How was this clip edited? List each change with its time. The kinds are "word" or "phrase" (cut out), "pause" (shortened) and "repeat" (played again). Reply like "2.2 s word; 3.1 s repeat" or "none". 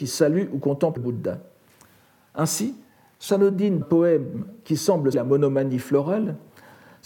1.0 s word; 3.3 s word; 3.8 s word; 5.1 s word